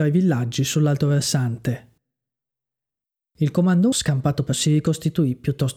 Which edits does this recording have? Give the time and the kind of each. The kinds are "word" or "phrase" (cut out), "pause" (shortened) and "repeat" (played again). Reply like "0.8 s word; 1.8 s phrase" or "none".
3.9 s word; 4.5 s word